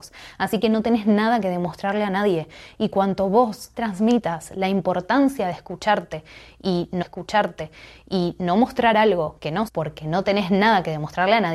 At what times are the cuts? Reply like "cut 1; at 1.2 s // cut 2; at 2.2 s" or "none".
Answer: cut 1; at 3.7 s // cut 2; at 7.0 s // cut 3; at 9.7 s